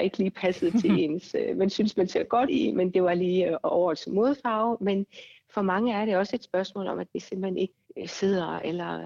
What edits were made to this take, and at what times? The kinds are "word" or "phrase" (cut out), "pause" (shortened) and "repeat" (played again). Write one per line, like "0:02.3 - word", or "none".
0:02.5 - word

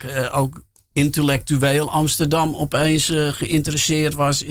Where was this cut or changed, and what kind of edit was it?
none

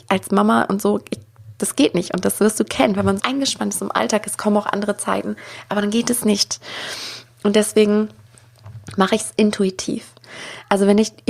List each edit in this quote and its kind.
0:03.2 - word

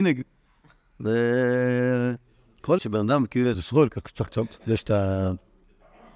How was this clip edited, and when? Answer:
0:02.8 - word
0:03.5 - phrase
0:04.3 - word
0:04.6 - pause

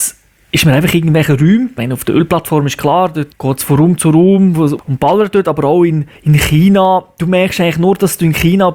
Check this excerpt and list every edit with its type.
0:06.2 - pause

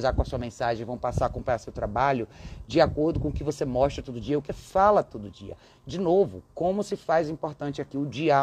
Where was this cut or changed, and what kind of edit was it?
0:04.5 - word

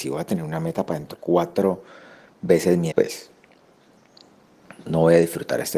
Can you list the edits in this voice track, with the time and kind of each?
0:01.1 - word
0:02.9 - word
0:04.9 - word

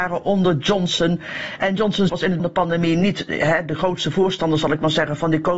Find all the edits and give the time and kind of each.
0:02.1 - word
0:02.4 - phrase

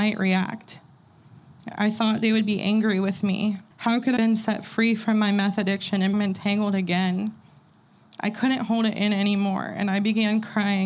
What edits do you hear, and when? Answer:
0:03.7 - pause
0:04.2 - word
0:06.1 - word

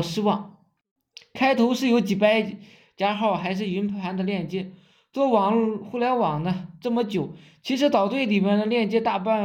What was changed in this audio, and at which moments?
none

